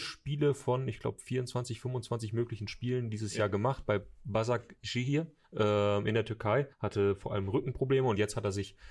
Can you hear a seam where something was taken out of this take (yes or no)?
yes